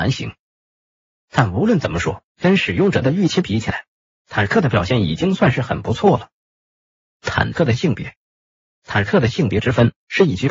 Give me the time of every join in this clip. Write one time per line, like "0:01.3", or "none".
0:02.3